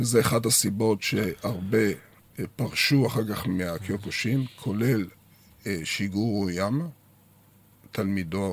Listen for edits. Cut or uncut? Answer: uncut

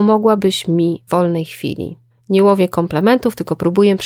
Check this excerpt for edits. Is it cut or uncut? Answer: cut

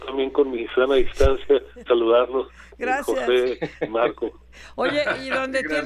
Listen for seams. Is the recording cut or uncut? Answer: cut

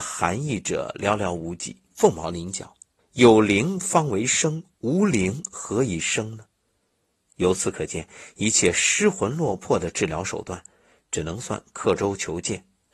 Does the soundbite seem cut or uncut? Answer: cut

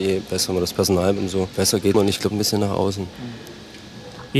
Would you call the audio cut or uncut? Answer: cut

